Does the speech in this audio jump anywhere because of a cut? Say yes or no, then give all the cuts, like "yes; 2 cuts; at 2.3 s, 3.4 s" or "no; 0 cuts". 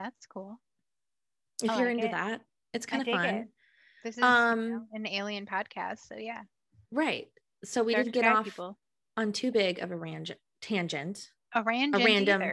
no; 0 cuts